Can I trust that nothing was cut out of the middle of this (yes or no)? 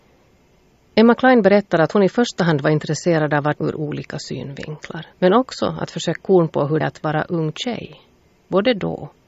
no